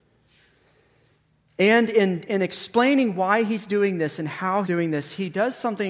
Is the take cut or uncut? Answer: cut